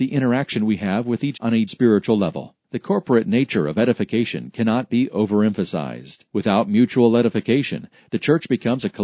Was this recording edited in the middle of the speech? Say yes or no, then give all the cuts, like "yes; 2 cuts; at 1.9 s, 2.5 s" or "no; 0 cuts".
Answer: yes; 4 cuts; at 1.3 s, 1.7 s, 2.6 s, 6.3 s